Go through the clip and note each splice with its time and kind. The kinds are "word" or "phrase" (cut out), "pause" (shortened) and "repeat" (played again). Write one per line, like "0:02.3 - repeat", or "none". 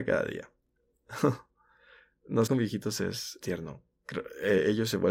0:02.5 - phrase
0:03.4 - word

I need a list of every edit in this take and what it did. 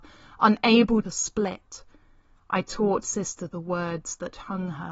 0:01.0 - phrase
0:03.0 - word

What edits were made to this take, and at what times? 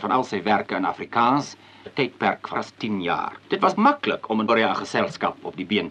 0:01.9 - word
0:02.5 - word
0:03.4 - pause
0:03.8 - word
0:04.5 - word

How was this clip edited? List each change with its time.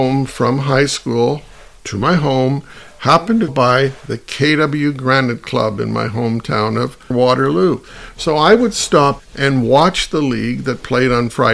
0:03.5 - word
0:07.1 - word
0:09.2 - word

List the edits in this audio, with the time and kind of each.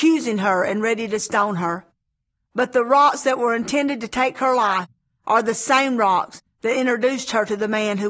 none

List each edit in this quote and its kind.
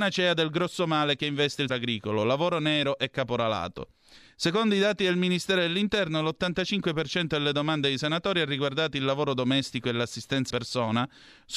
0:01.7 - word
0:10.5 - word

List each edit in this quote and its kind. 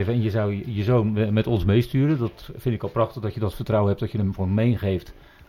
none

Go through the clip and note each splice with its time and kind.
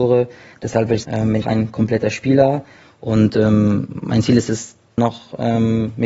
0:01.0 - word
0:01.4 - word
0:05.0 - word

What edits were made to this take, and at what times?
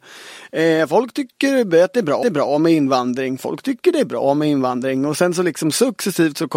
0:02.2 - repeat

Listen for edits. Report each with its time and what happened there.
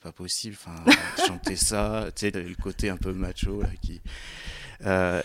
0:01.2 - phrase
0:02.3 - word

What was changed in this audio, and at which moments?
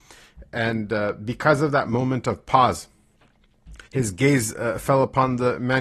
0:03.9 - pause

